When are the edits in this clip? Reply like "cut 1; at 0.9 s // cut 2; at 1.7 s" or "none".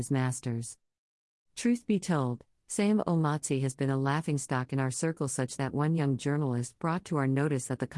none